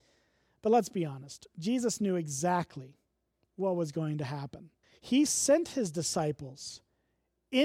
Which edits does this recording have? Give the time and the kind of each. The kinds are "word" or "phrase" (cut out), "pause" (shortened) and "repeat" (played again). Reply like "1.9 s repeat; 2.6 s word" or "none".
4.8 s pause

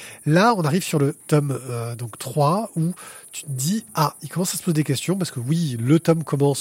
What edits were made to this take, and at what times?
1.2 s pause

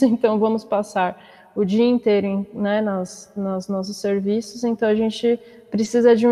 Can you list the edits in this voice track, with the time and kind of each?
none

